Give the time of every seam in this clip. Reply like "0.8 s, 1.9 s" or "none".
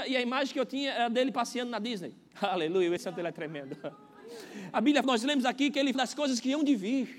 2.3 s, 3.0 s, 5.0 s, 5.9 s